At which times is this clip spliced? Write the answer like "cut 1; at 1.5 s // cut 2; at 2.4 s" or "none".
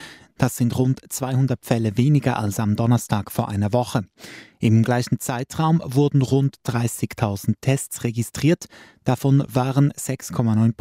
none

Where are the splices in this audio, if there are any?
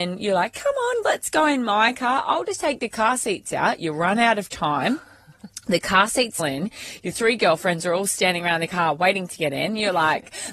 cut 1; at 6.4 s

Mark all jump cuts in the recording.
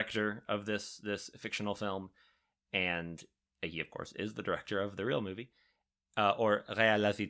none

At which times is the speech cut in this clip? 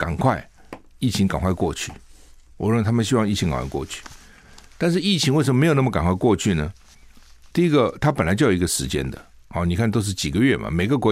none

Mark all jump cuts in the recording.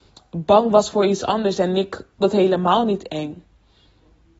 cut 1; at 2.2 s

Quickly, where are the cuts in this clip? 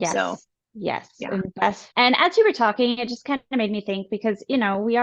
cut 1; at 1.9 s

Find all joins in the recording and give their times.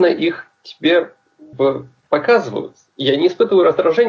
cut 1; at 1.5 s

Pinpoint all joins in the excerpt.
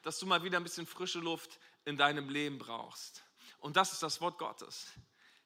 none

